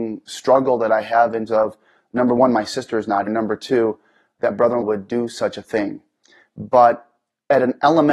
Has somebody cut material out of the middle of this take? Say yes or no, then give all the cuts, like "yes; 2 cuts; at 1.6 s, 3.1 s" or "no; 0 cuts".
yes; 4 cuts; at 1.5 s, 3.3 s, 4.5 s, 4.8 s